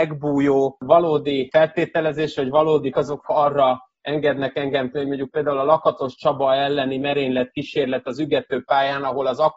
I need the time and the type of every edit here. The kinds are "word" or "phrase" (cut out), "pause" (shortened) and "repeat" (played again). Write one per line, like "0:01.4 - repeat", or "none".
0:02.9 - word
0:03.2 - word
0:04.9 - word